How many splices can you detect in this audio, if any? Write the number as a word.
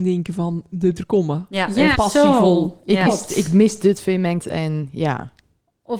four